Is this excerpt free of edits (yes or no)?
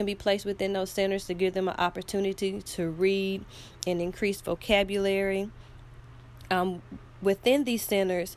yes